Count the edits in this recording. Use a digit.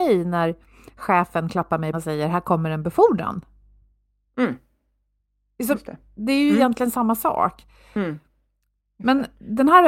1